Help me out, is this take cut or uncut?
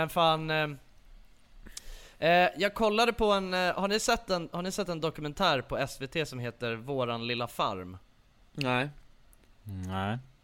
uncut